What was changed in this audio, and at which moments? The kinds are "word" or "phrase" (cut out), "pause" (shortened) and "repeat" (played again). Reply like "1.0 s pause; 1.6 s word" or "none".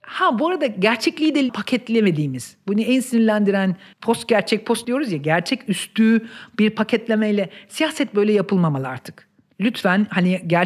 1.5 s word; 3.9 s phrase; 4.8 s word